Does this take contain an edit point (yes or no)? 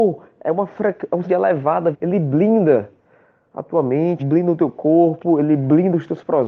yes